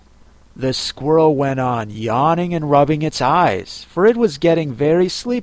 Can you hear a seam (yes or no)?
no